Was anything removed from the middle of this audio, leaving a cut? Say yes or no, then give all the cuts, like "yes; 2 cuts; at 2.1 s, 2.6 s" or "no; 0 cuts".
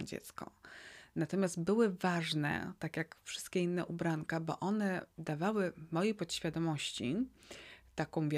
no; 0 cuts